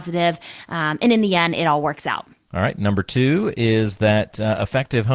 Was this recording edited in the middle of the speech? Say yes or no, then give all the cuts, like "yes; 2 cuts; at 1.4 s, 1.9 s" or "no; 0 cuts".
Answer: no; 0 cuts